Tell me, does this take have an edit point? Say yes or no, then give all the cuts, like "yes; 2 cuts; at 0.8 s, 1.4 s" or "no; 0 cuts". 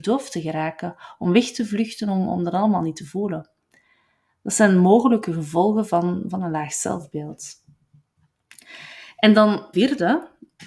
yes; 1 cut; at 9.7 s